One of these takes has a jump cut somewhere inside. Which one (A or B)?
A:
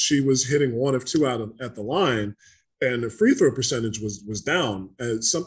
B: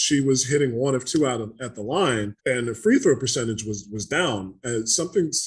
B